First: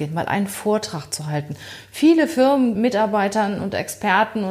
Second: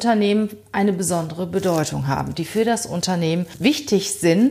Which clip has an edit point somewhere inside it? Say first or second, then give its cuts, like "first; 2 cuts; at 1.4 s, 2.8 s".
first; 1 cut; at 2.7 s